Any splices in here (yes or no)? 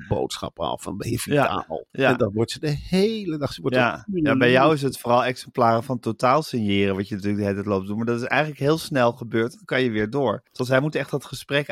yes